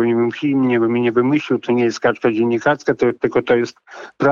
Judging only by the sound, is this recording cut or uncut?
uncut